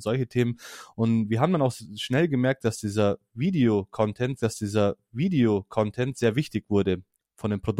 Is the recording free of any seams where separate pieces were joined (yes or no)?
no